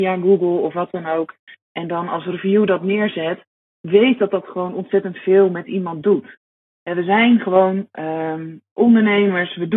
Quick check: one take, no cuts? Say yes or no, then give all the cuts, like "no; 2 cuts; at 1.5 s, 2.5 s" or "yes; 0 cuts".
yes; 0 cuts